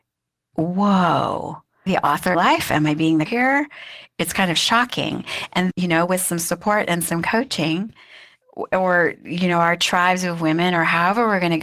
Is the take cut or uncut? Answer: cut